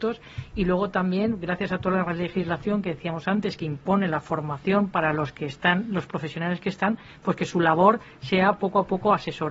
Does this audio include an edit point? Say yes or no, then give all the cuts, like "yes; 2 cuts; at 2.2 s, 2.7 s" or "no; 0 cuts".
no; 0 cuts